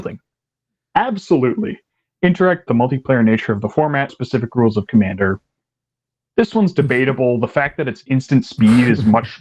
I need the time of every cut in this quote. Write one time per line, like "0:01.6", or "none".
0:02.7
0:04.1